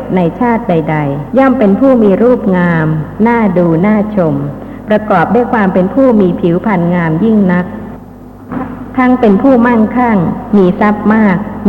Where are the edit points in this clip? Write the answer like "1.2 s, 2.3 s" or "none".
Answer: 1.3 s